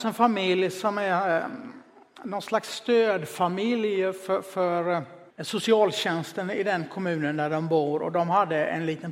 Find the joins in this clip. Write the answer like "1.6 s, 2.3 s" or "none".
5.3 s